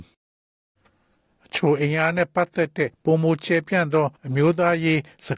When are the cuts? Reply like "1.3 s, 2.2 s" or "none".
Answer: 2.9 s, 4.2 s